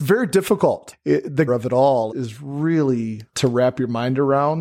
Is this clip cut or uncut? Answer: cut